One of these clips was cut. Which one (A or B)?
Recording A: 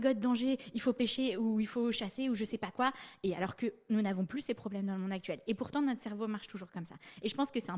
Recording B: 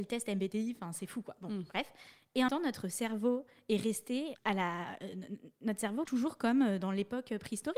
B